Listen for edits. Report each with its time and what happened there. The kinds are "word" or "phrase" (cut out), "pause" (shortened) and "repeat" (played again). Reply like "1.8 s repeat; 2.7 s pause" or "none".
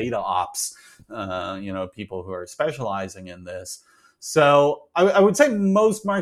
none